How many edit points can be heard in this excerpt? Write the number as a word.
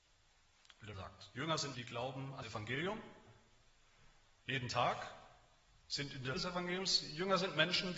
four